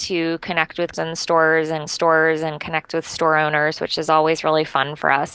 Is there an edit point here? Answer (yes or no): yes